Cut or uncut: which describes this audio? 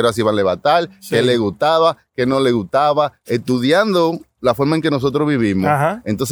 uncut